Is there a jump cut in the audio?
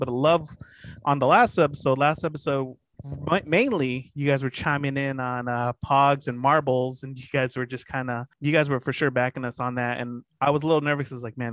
yes; 1 cut; at 8.3 s

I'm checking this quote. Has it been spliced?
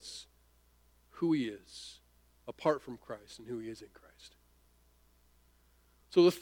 no; 0 cuts

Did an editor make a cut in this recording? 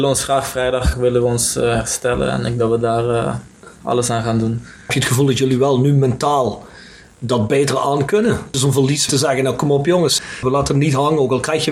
yes; 3 cuts; at 2.6 s, 3.7 s, 9.1 s

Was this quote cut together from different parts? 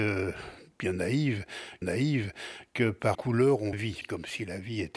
yes; 3 cuts; at 1.8 s, 3.1 s, 3.7 s

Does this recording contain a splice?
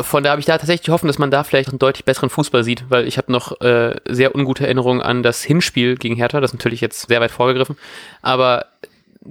yes; 2 cuts; at 1.6 s, 7.1 s

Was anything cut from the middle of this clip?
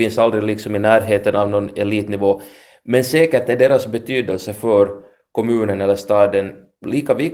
no; 0 cuts

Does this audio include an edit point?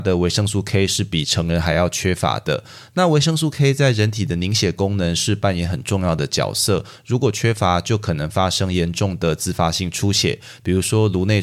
no; 0 cuts

